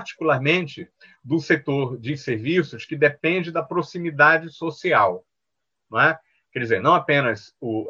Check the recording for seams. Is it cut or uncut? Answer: uncut